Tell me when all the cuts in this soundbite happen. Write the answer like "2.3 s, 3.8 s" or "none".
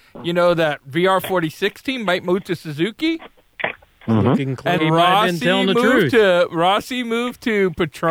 4.8 s